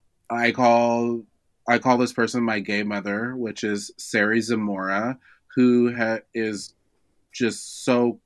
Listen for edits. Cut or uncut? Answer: uncut